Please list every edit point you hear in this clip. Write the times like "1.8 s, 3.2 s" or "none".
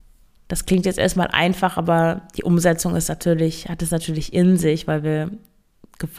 none